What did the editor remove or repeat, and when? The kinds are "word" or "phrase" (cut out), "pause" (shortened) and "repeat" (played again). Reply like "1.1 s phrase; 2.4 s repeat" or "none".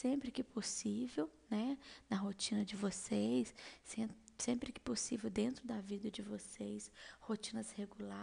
none